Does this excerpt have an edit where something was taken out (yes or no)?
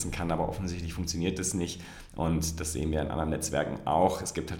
no